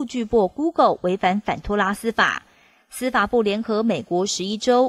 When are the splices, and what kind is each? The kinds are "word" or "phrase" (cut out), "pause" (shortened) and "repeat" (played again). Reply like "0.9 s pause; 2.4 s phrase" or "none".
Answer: none